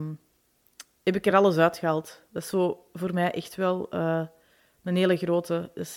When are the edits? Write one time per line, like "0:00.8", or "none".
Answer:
none